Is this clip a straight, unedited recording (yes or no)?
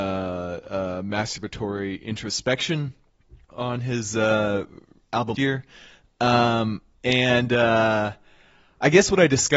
no